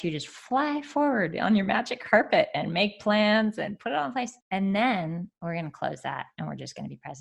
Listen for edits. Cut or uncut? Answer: cut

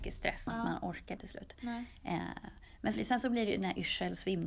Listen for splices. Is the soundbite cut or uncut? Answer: cut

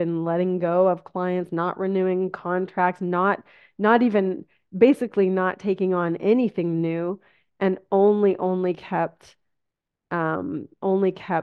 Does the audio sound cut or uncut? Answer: uncut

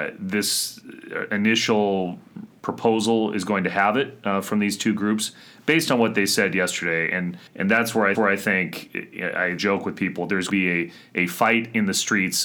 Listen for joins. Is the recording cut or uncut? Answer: cut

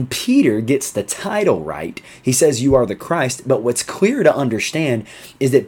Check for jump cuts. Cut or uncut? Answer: uncut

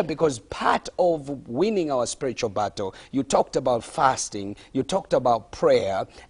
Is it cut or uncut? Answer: uncut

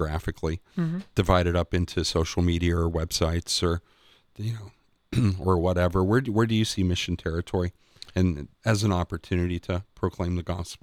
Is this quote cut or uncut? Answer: cut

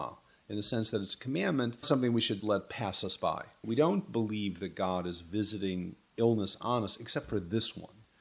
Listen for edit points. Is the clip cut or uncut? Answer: cut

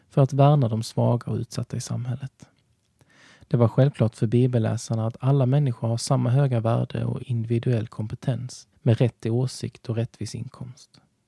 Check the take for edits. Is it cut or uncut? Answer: cut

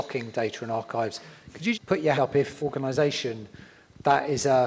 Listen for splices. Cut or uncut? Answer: cut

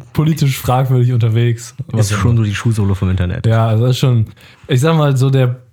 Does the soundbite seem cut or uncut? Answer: uncut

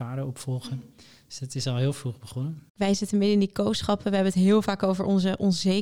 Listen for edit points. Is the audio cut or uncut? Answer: cut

